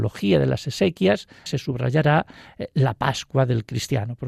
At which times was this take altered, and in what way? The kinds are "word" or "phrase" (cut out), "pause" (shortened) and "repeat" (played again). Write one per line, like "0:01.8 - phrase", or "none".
0:01.5 - word